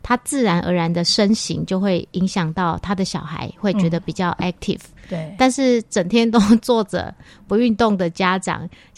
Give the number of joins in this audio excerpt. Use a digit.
0